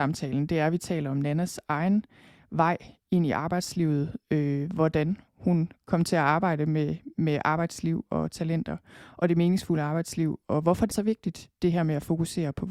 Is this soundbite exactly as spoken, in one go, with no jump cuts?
no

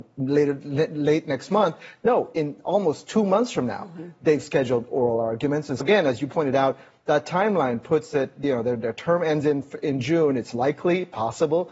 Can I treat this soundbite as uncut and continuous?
no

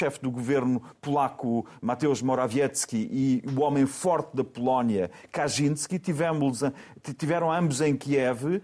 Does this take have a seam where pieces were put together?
no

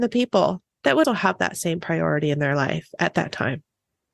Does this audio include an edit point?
yes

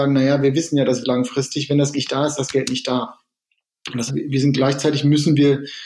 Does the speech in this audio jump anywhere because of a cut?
yes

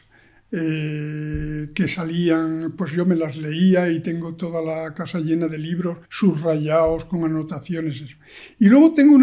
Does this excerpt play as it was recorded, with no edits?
no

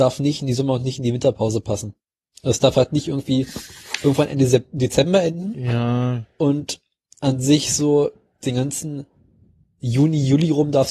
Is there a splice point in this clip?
no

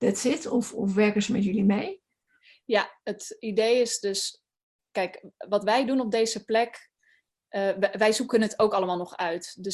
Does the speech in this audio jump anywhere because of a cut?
no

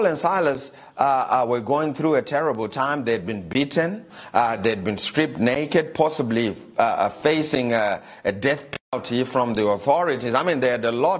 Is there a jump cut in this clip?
no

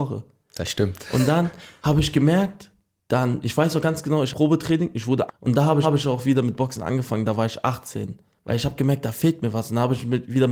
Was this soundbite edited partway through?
yes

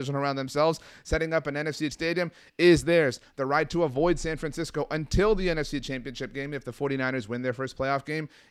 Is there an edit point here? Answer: yes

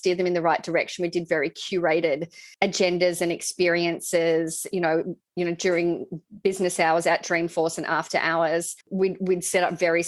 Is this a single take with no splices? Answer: no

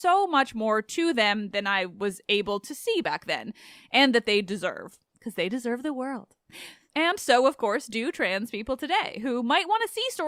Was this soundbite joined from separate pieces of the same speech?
no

